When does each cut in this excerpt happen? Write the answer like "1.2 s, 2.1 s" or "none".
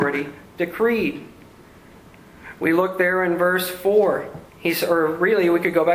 4.5 s